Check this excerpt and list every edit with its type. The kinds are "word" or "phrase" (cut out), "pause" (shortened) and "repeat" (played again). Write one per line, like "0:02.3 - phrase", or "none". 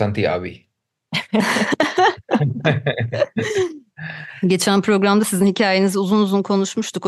none